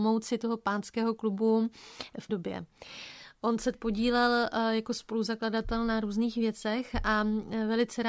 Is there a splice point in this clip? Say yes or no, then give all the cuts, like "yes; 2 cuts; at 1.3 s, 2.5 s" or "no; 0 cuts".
yes; 2 cuts; at 2.3 s, 3.7 s